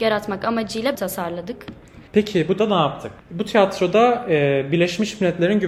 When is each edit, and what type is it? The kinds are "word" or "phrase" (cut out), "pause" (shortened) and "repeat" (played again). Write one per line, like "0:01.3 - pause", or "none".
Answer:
0:00.9 - phrase
0:02.1 - pause
0:02.6 - word
0:03.2 - pause